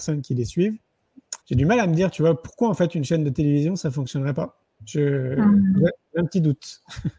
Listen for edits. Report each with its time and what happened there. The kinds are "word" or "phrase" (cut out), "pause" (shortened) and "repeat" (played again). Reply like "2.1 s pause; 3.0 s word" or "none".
1.4 s pause